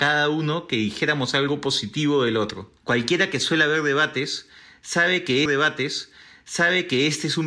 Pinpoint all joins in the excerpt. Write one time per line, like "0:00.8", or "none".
0:02.8
0:05.5

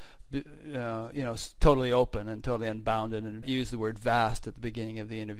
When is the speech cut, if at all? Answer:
0:03.4

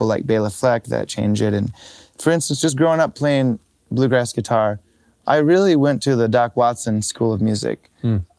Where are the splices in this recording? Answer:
none

